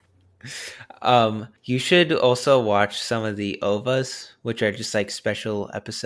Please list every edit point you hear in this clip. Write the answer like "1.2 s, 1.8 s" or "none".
1.6 s